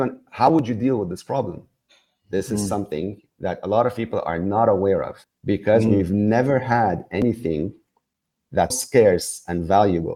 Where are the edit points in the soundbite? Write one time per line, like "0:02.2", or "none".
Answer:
0:05.2
0:08.7